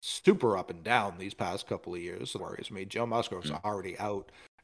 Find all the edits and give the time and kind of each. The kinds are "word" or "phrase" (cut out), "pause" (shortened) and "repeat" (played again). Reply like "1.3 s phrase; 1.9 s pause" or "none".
2.4 s word

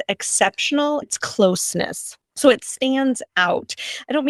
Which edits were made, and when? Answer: 1.0 s word; 2.2 s pause

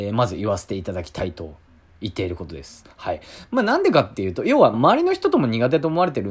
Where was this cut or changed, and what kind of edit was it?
4.7 s word

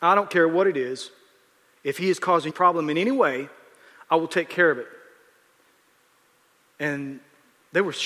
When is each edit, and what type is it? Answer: 2.5 s phrase

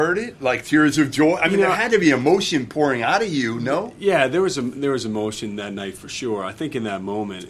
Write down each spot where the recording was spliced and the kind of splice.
none

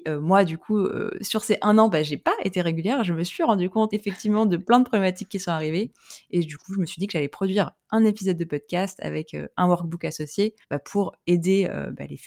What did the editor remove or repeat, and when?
3.9 s word; 10.6 s pause

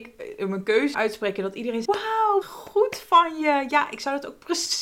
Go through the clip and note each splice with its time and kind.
0.9 s word; 1.8 s word; 2.4 s word

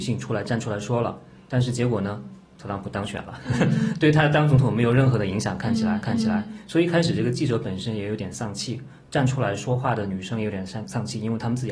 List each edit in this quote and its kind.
6.0 s repeat

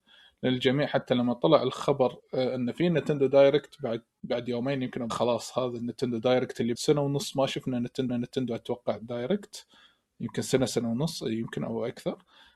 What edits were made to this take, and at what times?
2.2 s pause; 5.1 s phrase; 6.7 s word; 8.1 s repeat

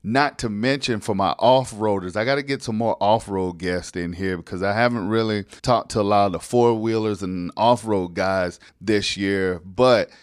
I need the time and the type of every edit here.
5.6 s pause; 8.7 s pause

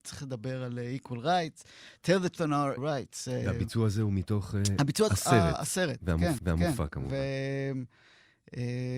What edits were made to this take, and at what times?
2.3 s word; 2.8 s word; 5.1 s phrase; 6.4 s repeat

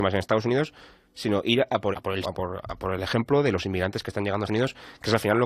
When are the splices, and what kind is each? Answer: 1.9 s word; 2.2 s word; 4.5 s word

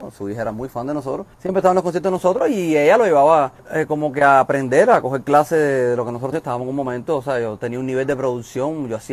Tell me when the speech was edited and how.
1.3 s pause; 3.6 s pause; 6.3 s word

